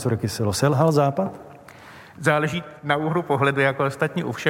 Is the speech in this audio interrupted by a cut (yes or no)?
yes